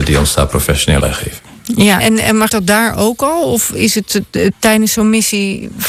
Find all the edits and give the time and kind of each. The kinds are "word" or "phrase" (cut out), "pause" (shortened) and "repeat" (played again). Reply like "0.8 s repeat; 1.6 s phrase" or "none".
1.0 s word; 2.0 s word; 2.5 s word